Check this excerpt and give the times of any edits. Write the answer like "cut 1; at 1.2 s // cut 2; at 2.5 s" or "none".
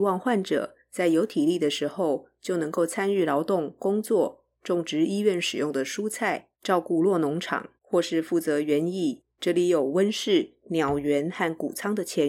cut 1; at 4.5 s // cut 2; at 6.5 s // cut 3; at 7.8 s // cut 4; at 9.3 s